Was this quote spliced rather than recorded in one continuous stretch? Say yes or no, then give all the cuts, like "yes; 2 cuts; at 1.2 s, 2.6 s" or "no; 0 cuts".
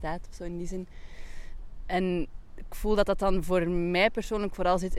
no; 0 cuts